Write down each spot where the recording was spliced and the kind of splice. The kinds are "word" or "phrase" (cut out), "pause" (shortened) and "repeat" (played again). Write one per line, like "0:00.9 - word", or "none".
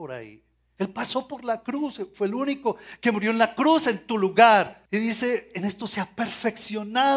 0:04.9 - pause